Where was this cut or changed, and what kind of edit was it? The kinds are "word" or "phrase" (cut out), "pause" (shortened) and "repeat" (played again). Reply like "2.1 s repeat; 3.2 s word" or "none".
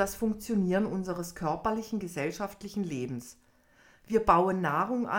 none